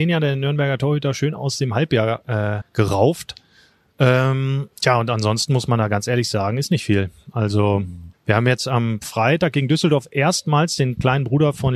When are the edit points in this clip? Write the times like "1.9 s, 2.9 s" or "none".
2.6 s, 4.7 s, 8.1 s